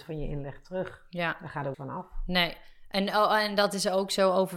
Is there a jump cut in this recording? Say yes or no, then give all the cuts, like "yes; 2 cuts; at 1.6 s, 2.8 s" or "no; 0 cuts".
yes; 1 cut; at 1.7 s